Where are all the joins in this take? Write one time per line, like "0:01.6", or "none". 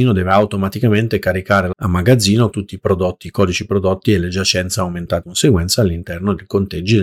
0:01.7
0:02.5
0:05.2